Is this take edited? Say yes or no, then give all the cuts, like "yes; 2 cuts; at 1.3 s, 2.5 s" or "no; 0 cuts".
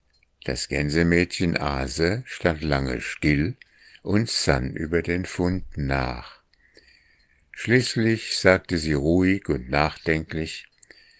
no; 0 cuts